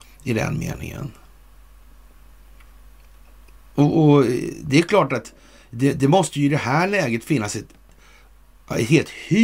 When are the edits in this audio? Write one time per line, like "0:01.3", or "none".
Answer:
none